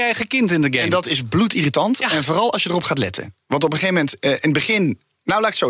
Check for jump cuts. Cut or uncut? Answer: uncut